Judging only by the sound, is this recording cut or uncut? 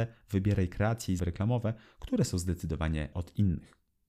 cut